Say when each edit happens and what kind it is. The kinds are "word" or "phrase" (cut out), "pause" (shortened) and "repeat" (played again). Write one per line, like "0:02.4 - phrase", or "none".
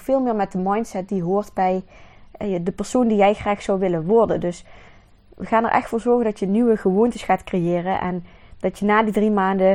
none